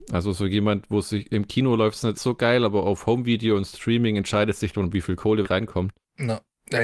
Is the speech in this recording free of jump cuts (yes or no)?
no